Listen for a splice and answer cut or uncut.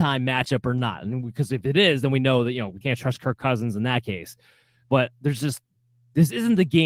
cut